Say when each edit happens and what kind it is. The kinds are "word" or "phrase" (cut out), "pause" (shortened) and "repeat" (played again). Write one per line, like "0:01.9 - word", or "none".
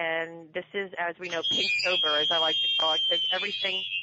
none